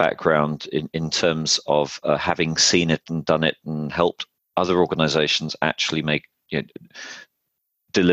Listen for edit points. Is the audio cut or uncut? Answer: uncut